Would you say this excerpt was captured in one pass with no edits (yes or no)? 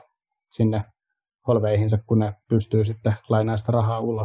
yes